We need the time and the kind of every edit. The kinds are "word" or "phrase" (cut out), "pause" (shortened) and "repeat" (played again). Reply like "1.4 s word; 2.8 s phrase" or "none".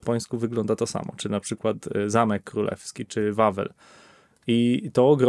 none